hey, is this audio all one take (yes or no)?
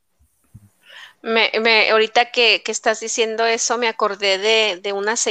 yes